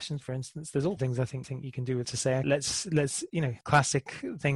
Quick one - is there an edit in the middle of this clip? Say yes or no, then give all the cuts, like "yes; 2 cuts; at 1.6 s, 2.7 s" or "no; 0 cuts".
yes; 5 cuts; at 1.0 s, 1.4 s, 2.0 s, 2.4 s, 3.6 s